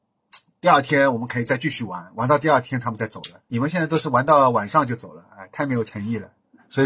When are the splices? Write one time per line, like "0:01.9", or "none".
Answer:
0:03.4